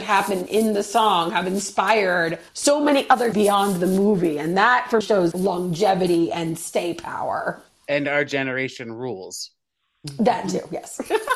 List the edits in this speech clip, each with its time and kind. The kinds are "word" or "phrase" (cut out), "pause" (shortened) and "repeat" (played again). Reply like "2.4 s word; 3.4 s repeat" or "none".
2.5 s pause; 3.3 s word; 5.0 s word; 5.3 s word; 7.7 s pause